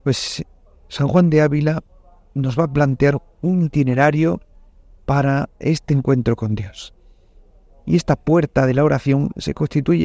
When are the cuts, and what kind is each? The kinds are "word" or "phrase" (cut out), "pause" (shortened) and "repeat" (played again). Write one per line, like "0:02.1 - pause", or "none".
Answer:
none